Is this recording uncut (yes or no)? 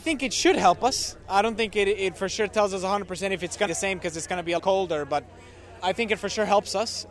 no